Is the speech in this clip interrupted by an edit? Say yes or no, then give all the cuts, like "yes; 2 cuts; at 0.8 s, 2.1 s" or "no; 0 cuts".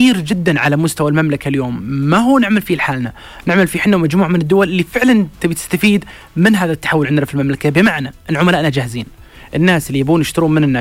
no; 0 cuts